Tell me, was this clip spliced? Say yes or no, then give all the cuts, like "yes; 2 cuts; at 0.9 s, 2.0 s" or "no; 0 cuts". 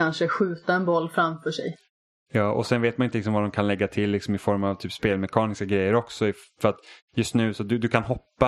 no; 0 cuts